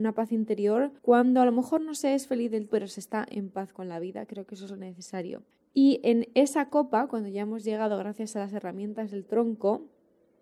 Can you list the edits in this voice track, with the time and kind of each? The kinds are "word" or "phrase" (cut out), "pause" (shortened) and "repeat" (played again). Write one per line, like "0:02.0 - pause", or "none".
0:01.0 - pause
0:02.7 - word
0:05.5 - pause